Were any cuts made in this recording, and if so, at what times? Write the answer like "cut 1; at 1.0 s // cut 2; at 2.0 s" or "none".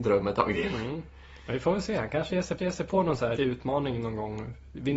cut 1; at 2.6 s // cut 2; at 3.4 s